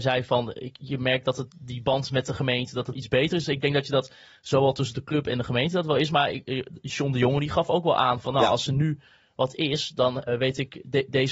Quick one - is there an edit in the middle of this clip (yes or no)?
yes